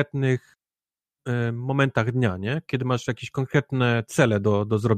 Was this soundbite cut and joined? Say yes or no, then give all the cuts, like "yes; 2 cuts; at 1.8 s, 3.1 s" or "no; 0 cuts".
no; 0 cuts